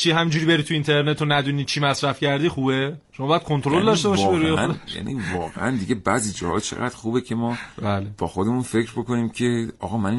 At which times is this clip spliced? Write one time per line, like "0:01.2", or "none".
0:03.0
0:07.7